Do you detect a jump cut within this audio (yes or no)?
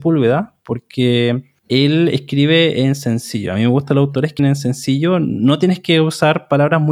yes